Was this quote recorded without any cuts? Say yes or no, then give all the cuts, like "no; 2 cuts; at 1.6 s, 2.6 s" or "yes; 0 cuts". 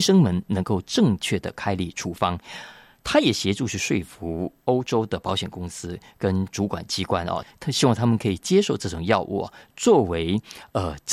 yes; 0 cuts